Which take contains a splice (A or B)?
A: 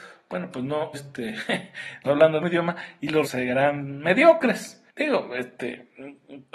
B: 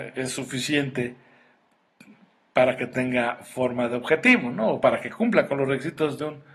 A